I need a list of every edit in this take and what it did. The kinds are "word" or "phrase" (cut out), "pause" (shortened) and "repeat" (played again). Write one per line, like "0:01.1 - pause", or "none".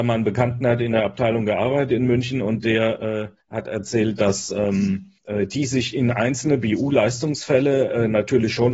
0:03.4 - pause
0:05.2 - pause